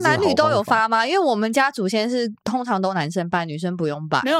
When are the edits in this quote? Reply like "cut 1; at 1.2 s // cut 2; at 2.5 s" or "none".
cut 1; at 2.4 s